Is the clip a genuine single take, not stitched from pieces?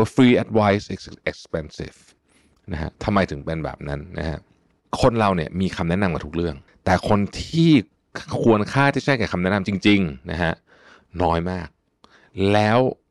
no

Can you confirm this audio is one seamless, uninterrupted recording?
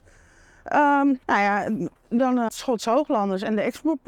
no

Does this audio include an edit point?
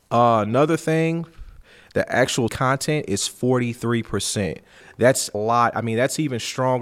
yes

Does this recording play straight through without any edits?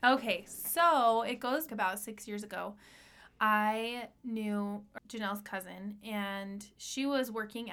no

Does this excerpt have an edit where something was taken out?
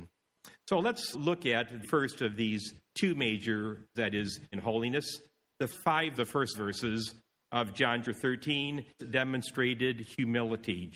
yes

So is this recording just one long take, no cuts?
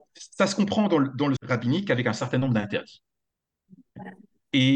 no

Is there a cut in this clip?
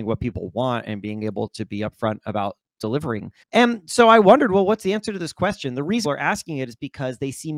yes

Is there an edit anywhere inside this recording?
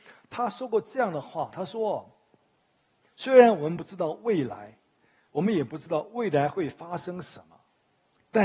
no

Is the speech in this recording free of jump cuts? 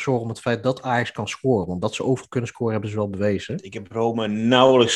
yes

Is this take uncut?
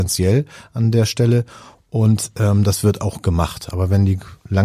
yes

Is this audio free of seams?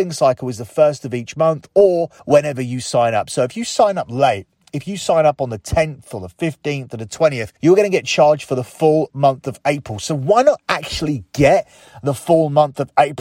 no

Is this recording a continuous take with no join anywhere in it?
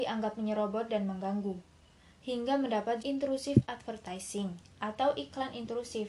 no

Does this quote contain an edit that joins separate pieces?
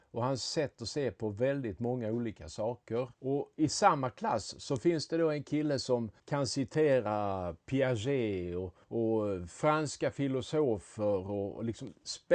yes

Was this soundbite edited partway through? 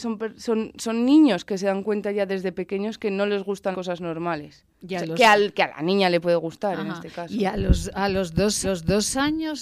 yes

